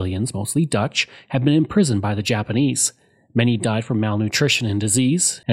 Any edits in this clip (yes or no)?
no